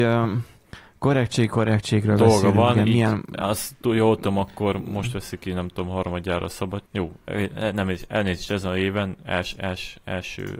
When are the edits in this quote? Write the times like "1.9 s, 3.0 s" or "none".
6.9 s